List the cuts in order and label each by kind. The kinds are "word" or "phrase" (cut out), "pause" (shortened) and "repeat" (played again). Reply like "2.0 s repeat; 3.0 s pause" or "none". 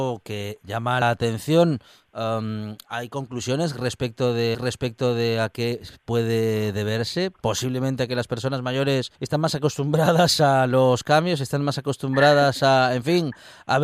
1.0 s word; 4.5 s repeat; 9.2 s pause